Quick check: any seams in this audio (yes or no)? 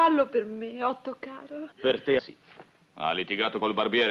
yes